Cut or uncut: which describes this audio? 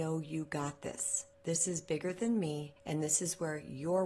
cut